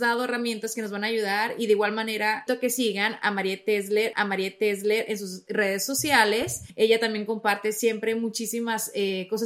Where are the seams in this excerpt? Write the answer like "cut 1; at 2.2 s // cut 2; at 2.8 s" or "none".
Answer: cut 1; at 2.5 s // cut 2; at 4.1 s // cut 3; at 6.7 s